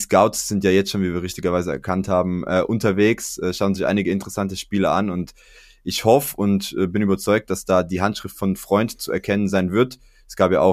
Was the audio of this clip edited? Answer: no; 0 cuts

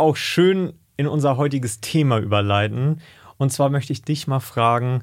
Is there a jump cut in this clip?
no; 0 cuts

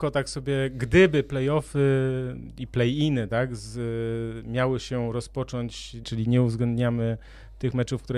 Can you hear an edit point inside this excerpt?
yes; 1 cut; at 6.0 s

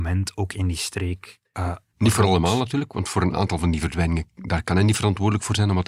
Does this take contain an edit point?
no; 0 cuts

